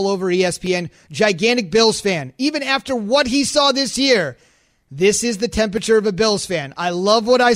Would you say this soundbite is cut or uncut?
uncut